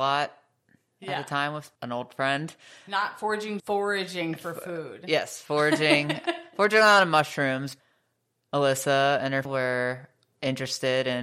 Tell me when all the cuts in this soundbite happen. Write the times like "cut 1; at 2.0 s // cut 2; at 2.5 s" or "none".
cut 1; at 1.8 s // cut 2; at 3.6 s // cut 3; at 9.5 s

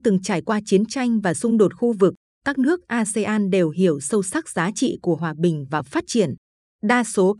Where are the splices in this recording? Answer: none

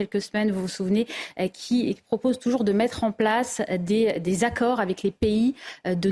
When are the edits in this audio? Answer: none

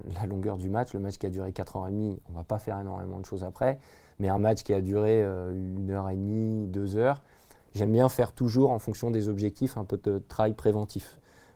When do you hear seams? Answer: none

